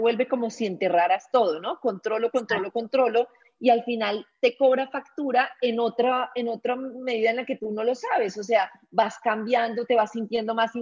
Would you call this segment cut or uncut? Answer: uncut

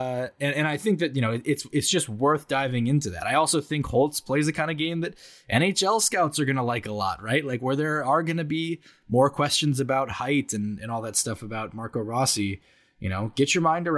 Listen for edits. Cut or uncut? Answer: uncut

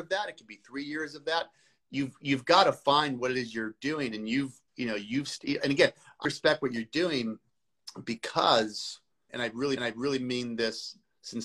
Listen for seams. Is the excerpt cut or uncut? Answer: cut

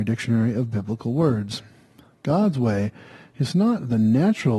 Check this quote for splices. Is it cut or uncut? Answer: uncut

